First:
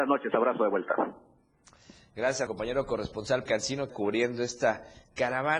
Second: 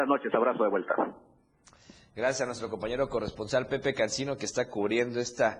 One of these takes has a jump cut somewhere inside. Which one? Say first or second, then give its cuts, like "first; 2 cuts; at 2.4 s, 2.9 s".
first; 3 cuts; at 2.5 s, 3.5 s, 3.9 s